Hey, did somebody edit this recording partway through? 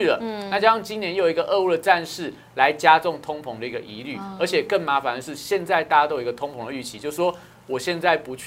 no; 0 cuts

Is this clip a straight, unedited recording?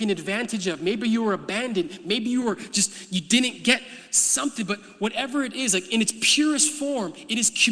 yes; 0 cuts

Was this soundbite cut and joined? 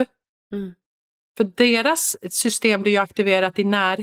no; 0 cuts

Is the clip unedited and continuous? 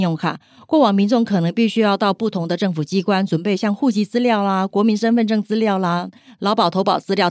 yes; 0 cuts

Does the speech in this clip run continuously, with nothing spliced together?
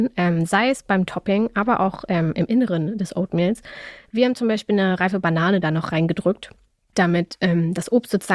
yes; 0 cuts

